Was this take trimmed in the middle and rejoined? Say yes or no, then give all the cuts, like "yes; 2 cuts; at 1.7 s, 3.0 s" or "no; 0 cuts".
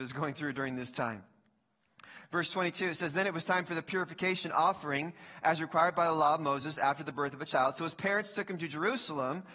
no; 0 cuts